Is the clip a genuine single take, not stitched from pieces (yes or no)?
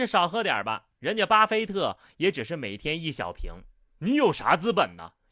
yes